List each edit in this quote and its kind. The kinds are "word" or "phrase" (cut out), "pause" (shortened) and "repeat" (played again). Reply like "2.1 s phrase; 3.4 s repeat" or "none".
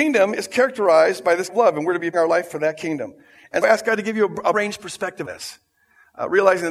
1.5 s word; 2.1 s word; 3.6 s word; 4.5 s word; 5.2 s word